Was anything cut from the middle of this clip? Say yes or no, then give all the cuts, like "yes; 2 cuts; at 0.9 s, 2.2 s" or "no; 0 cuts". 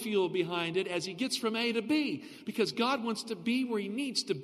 no; 0 cuts